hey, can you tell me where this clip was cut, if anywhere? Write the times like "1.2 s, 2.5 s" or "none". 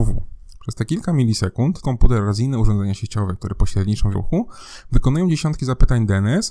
1.8 s, 4.1 s